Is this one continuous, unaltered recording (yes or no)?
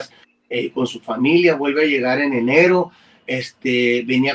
yes